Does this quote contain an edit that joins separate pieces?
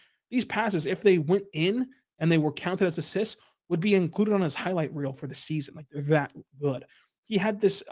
no; 0 cuts

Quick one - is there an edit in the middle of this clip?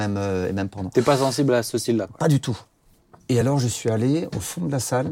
no; 0 cuts

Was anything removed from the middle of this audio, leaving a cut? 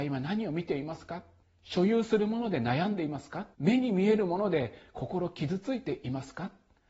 yes; 2 cuts; at 1.4 s, 3.5 s

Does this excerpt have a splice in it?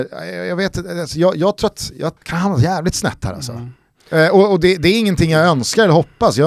yes; 1 cut; at 2.2 s

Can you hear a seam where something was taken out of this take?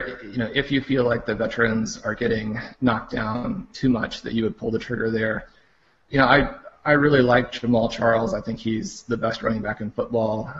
no; 0 cuts

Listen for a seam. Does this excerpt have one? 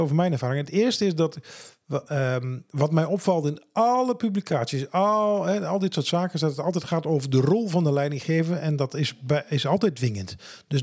no; 0 cuts

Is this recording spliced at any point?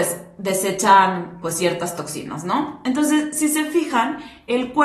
no; 0 cuts

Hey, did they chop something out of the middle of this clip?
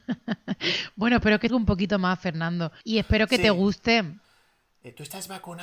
yes; 2 cuts; at 1.5 s, 2.8 s

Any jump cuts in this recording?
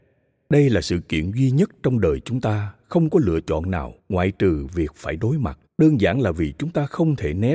yes; 2 cuts; at 4.0 s, 5.7 s

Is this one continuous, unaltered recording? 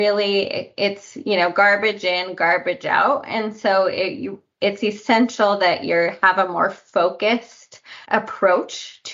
no; 1 cut; at 8.0 s

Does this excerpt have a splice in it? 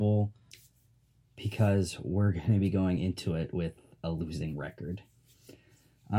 no; 0 cuts

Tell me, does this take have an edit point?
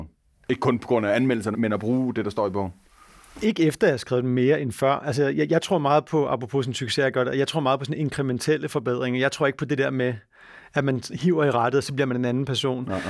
yes; 1 cut; at 1.5 s

